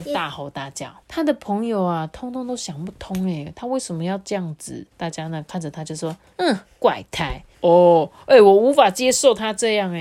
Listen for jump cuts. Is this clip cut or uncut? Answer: cut